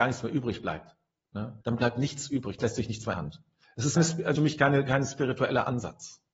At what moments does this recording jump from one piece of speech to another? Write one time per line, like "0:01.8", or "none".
0:01.6
0:02.6
0:03.1
0:03.6
0:04.0
0:04.4